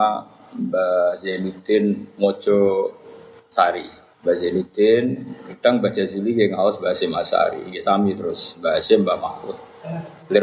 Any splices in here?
yes; 1 cut; at 4.1 s

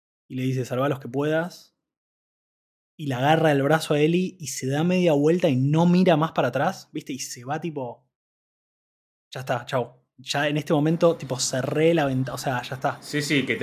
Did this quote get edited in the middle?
no; 0 cuts

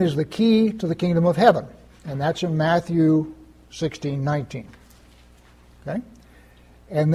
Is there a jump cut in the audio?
no; 0 cuts

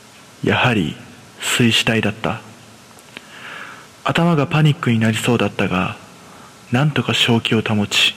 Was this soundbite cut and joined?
yes; 1 cut; at 3.9 s

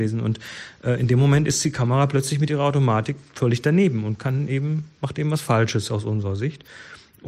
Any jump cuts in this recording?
no; 0 cuts

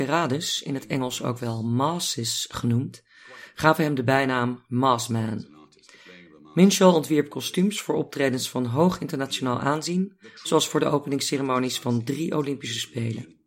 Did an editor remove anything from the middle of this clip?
no; 0 cuts

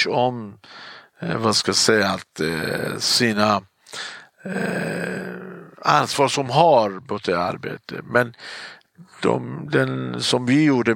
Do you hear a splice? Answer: no; 0 cuts

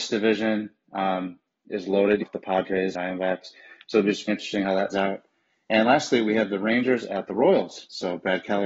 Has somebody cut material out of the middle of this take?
yes; 4 cuts; at 2.2 s, 2.9 s, 4.3 s, 4.9 s

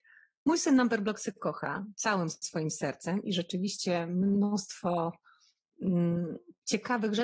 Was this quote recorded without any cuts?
yes; 0 cuts

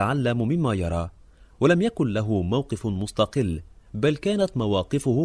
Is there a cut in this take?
no; 0 cuts

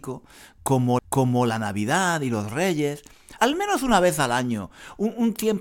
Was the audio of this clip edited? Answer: yes; 2 cuts; at 1.0 s, 3.4 s

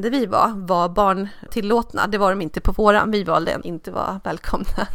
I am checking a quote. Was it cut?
yes; 2 cuts; at 1.5 s, 3.6 s

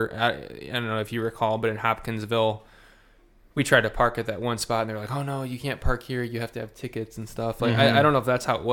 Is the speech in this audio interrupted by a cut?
no; 0 cuts

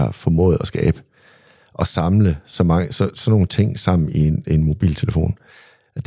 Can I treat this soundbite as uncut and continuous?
yes; 0 cuts

